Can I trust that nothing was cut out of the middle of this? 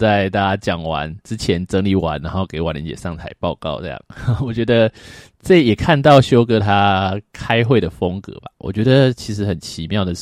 no; 1 cut; at 1.2 s

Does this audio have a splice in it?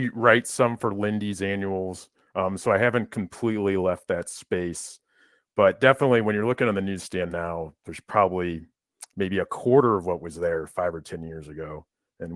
no; 0 cuts

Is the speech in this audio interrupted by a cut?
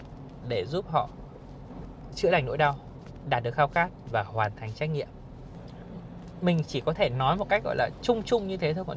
no; 0 cuts

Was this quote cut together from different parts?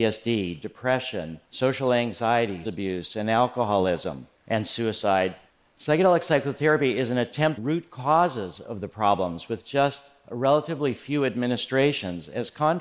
yes; 4 cuts; at 1.4 s, 2.6 s, 4.4 s, 7.6 s

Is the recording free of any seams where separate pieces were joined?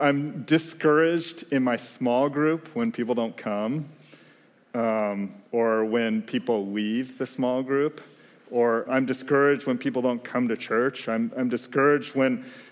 no; 1 cut; at 8.9 s

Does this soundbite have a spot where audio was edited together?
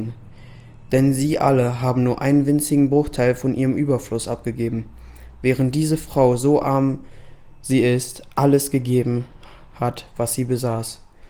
no; 0 cuts

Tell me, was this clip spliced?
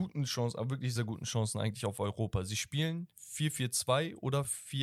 yes; 2 cuts; at 1.0 s, 3.1 s

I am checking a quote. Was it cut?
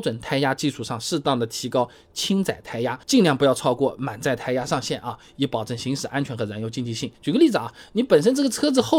yes; 2 cuts; at 3.0 s, 7.1 s

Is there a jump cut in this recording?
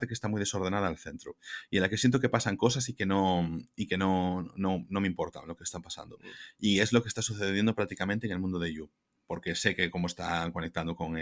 no; 0 cuts

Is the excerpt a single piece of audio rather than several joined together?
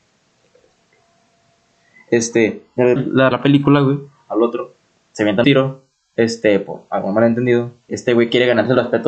no; 4 cuts; at 3.0 s, 3.3 s, 5.4 s, 7.9 s

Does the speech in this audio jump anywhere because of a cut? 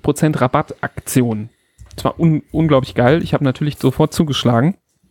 no; 0 cuts

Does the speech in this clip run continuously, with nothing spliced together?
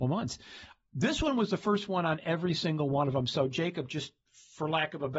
yes; 0 cuts

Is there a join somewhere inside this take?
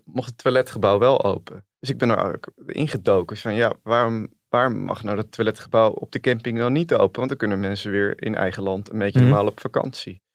yes; 1 cut; at 1.7 s

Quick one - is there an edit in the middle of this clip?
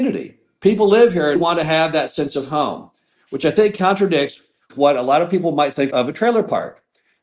yes; 1 cut; at 1.4 s

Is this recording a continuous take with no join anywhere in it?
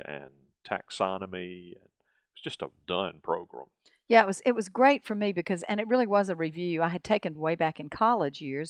no; 2 cuts; at 2.8 s, 7.3 s

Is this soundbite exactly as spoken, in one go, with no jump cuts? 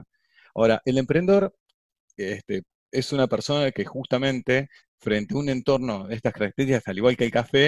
no; 1 cut; at 4.8 s

